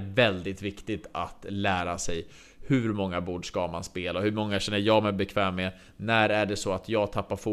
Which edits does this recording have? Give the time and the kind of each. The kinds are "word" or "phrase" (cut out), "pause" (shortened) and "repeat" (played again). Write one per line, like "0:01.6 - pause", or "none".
none